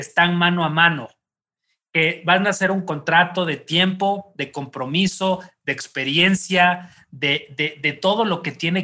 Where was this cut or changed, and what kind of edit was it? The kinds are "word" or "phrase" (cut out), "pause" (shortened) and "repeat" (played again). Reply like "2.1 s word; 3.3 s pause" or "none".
none